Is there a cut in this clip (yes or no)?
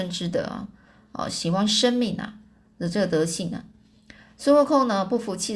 no